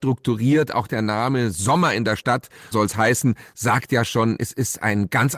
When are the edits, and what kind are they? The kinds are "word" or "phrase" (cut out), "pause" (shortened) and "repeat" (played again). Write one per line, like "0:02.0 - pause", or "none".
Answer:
0:02.7 - word